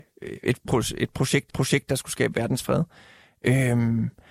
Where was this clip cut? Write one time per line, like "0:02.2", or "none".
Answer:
0:01.5